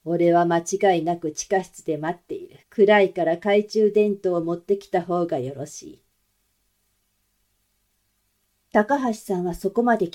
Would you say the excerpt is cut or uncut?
cut